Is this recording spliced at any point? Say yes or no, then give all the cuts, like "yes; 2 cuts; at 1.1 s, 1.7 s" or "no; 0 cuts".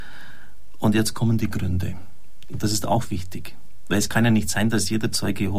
no; 0 cuts